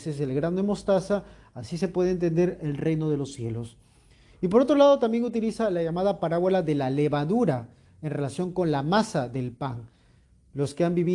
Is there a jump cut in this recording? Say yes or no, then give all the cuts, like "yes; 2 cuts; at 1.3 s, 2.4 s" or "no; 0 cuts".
no; 0 cuts